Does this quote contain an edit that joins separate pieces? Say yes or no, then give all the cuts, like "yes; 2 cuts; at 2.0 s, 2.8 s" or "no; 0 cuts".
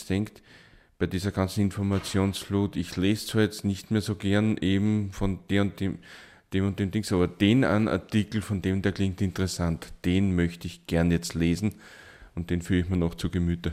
no; 0 cuts